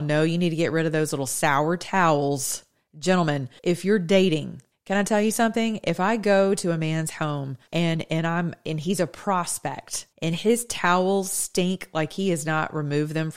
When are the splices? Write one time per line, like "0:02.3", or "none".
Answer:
0:03.6
0:04.7
0:07.7
0:10.1